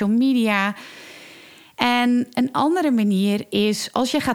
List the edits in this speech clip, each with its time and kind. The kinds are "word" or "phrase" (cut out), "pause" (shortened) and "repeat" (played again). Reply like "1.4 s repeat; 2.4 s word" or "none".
none